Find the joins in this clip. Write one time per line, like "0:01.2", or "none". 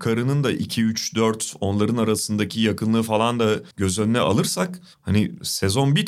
0:03.7